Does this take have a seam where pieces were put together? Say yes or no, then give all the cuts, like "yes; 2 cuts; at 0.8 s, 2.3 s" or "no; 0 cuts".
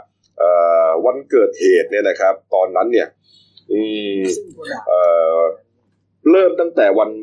no; 0 cuts